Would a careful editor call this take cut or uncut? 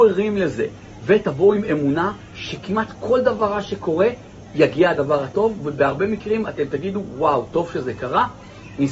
uncut